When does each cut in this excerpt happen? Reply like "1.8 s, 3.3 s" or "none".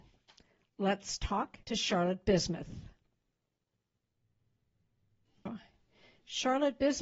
1.6 s